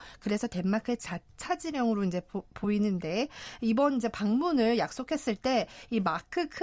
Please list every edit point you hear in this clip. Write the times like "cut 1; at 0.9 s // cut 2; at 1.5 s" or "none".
none